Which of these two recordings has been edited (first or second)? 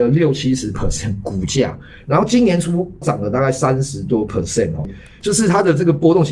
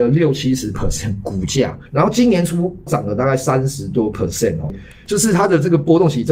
second